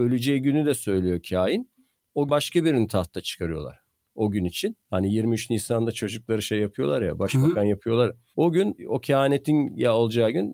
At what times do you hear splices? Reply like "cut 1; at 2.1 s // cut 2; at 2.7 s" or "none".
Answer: cut 1; at 2.3 s // cut 2; at 4.8 s